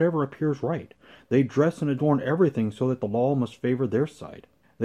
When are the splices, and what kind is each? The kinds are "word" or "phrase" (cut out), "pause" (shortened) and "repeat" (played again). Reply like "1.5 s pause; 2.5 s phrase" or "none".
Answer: none